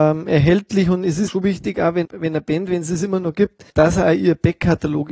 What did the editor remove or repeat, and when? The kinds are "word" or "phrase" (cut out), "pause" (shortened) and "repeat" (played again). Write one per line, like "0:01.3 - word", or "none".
0:01.3 - word
0:02.0 - word
0:03.7 - pause

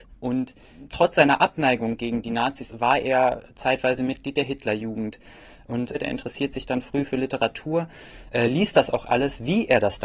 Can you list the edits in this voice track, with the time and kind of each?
none

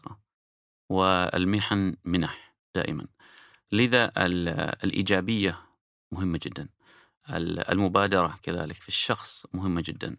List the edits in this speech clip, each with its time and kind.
none

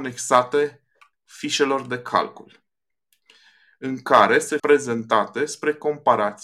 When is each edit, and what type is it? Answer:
0:04.6 - word

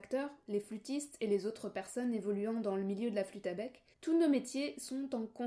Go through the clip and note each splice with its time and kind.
0:03.9 - pause

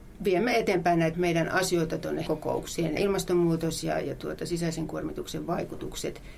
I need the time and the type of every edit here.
0:01.1 - word
0:02.3 - word
0:03.0 - phrase

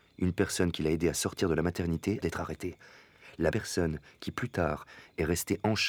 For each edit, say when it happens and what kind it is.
0:02.2 - word
0:03.5 - word

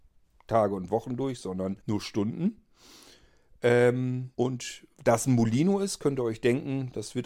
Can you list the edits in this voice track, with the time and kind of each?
0:01.8 - pause
0:04.3 - pause

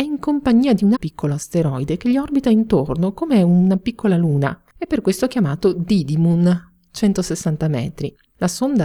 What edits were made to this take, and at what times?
0:00.9 - word
0:04.7 - pause

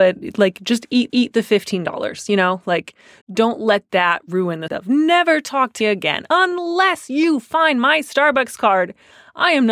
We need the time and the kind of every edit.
0:01.1 - repeat
0:03.2 - word
0:04.7 - word
0:05.8 - word

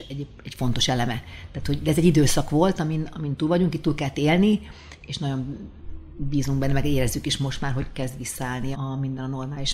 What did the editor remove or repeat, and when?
0:08.7 - word

